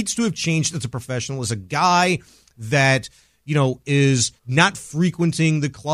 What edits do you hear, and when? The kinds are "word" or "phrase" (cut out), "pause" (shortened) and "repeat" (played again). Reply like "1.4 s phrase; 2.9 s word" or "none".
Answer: 4.4 s pause